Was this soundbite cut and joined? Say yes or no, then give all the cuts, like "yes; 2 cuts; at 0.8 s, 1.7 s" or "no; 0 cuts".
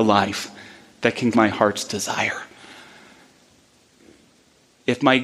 yes; 1 cut; at 1.3 s